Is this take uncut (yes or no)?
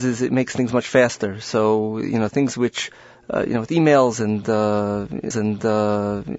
no